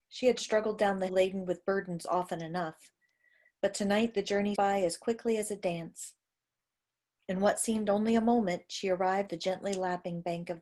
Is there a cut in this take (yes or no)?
yes